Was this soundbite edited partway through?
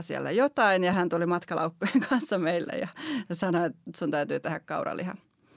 no; 0 cuts

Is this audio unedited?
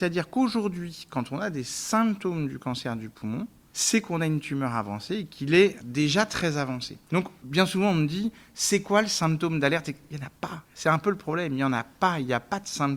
no; 2 cuts; at 5.8 s, 7.0 s

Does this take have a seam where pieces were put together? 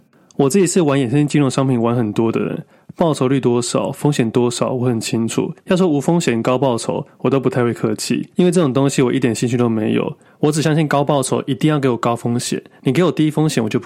yes; 2 cuts; at 5.6 s, 8.3 s

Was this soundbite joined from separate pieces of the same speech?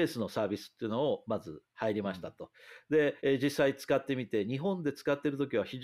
yes; 1 cut; at 3.2 s

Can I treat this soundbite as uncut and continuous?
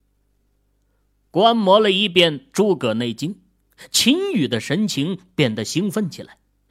yes; 0 cuts

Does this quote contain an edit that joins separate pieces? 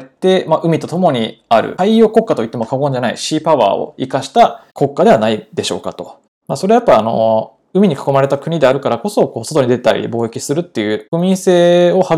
no; 0 cuts

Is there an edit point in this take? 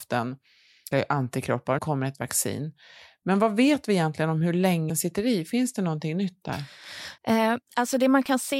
yes; 4 cuts; at 0.9 s, 1.8 s, 4.9 s, 7.2 s

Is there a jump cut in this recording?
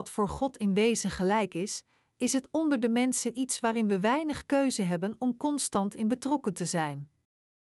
no; 0 cuts

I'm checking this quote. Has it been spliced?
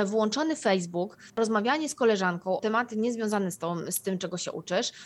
yes; 1 cut; at 2.6 s

